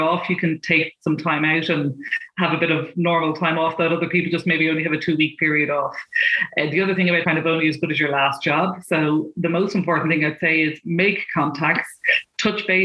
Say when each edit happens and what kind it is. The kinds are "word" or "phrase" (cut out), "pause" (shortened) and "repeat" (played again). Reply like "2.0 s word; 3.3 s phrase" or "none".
7.2 s phrase